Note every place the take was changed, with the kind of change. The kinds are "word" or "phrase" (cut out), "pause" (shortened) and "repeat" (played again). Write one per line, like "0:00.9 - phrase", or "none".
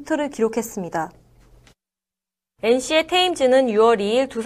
none